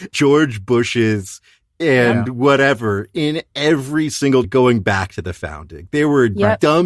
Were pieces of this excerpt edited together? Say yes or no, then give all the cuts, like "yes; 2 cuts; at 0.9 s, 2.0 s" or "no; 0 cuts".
yes; 1 cut; at 4.4 s